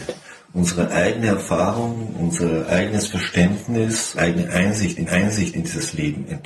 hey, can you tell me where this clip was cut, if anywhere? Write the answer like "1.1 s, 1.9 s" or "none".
4.2 s, 5.1 s